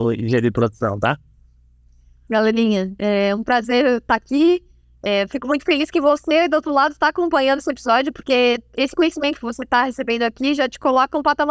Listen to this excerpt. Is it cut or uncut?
uncut